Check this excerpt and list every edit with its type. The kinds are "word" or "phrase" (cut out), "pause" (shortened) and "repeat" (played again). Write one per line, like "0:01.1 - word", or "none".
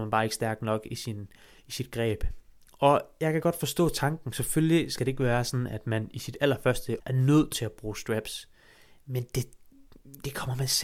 0:07.0 - word